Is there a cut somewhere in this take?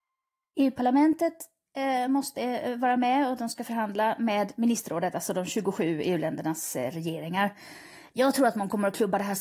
no; 0 cuts

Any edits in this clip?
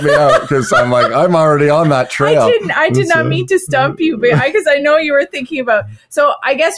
no; 0 cuts

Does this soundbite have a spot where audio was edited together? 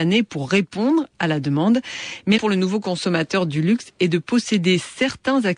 yes; 1 cut; at 2.4 s

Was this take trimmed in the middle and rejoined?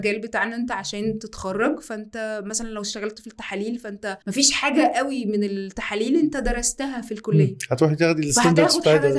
yes; 1 cut; at 4.2 s

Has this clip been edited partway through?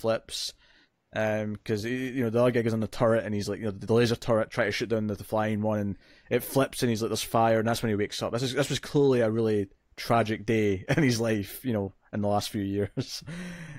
no; 0 cuts

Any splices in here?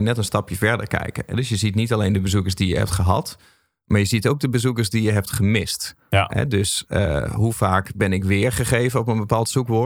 no; 0 cuts

